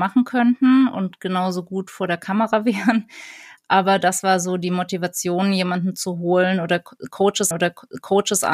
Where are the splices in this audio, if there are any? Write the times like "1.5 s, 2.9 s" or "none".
7.5 s